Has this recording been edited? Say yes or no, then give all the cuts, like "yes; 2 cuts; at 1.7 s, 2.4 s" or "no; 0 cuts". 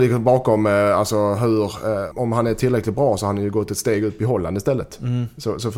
yes; 1 cut; at 2.1 s